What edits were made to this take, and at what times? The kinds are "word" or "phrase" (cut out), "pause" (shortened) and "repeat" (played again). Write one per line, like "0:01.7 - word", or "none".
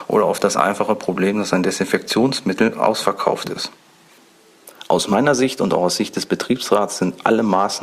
none